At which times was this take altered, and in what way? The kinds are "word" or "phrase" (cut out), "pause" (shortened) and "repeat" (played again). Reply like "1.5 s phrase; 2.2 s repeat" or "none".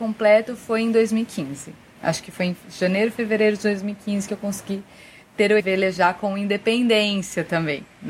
5.6 s phrase